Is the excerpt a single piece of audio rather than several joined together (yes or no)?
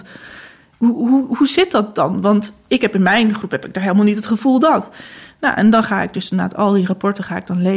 yes